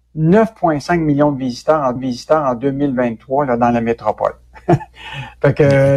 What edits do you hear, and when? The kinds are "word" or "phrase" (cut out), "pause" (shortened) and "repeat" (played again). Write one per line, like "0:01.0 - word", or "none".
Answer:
0:02.0 - repeat